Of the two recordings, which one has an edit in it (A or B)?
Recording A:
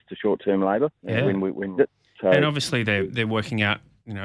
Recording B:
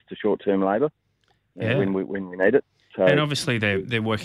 A